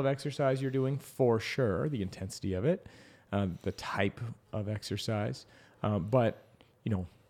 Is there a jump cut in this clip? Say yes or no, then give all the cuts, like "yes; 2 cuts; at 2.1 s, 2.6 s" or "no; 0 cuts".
no; 0 cuts